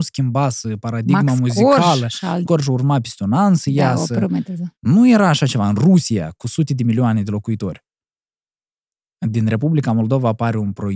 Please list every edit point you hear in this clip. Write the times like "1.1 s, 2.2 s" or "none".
2.4 s, 4.7 s